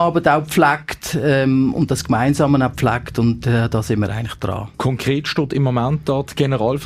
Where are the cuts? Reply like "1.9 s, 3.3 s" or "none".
4.7 s

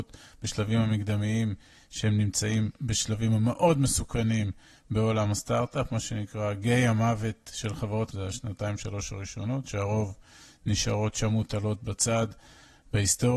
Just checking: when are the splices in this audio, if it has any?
8.1 s

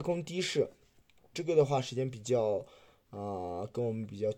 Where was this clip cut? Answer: 1.3 s

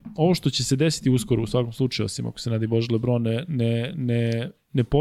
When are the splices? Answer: none

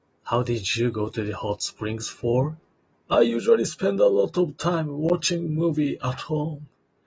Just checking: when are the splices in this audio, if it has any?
2.7 s

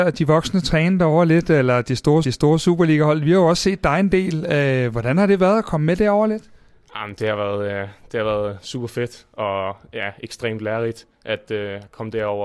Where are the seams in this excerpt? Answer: 2.2 s, 11.1 s

